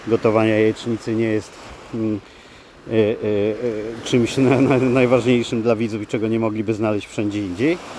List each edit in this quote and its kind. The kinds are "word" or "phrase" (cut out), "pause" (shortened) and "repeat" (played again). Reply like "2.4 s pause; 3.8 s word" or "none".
none